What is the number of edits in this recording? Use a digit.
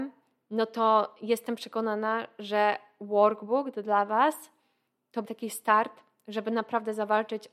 1